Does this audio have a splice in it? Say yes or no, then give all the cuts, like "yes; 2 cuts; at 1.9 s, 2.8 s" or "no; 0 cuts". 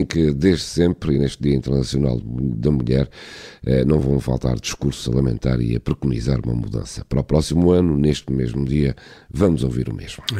no; 0 cuts